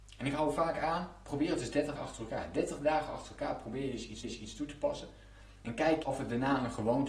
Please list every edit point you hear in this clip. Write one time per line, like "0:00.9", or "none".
0:02.0
0:04.2
0:06.0